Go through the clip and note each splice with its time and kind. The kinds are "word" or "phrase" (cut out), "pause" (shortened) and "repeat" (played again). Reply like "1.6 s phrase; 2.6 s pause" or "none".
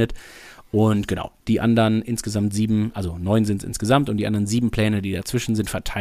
none